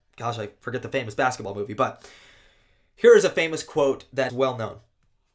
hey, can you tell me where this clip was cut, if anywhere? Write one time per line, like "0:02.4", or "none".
0:04.3